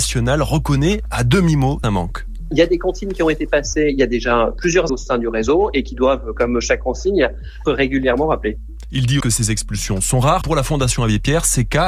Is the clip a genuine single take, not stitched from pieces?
no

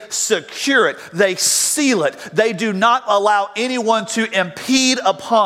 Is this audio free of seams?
yes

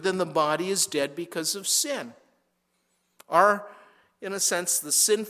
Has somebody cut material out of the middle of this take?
no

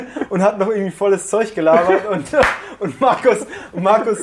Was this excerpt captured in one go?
yes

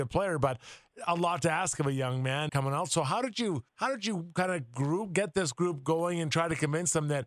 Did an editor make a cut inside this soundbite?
yes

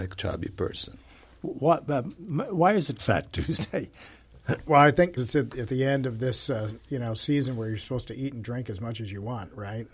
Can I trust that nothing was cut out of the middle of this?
no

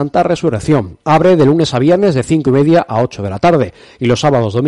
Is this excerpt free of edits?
no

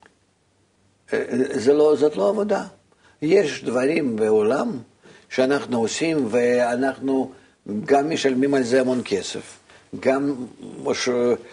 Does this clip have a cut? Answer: no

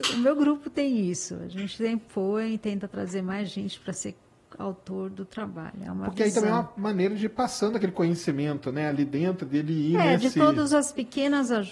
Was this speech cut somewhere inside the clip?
no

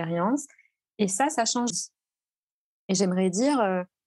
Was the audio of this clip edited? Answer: yes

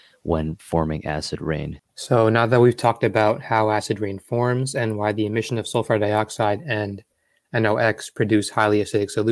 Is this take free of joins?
no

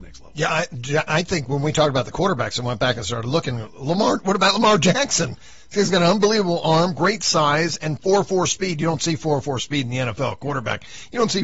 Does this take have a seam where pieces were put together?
no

